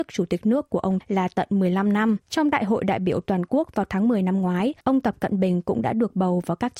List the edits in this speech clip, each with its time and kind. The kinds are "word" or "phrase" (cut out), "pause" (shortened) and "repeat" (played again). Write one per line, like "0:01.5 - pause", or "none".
0:01.0 - phrase
0:02.2 - pause
0:04.8 - pause